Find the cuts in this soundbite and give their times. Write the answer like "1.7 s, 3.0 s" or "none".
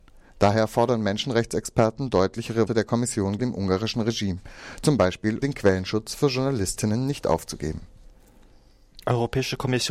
2.7 s, 3.4 s, 5.4 s